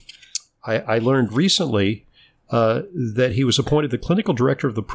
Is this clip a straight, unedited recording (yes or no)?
yes